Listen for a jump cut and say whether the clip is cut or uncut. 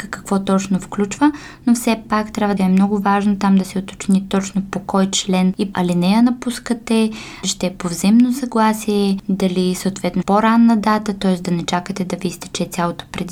cut